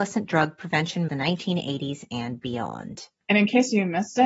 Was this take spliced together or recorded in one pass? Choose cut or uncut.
cut